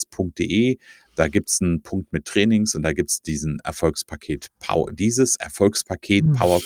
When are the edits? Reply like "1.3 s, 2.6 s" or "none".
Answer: none